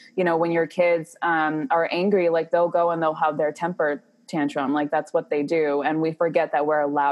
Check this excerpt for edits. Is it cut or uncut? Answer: uncut